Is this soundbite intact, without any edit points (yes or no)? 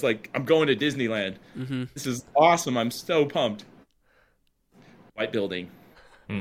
yes